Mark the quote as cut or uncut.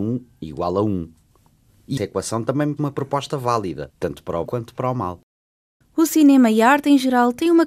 cut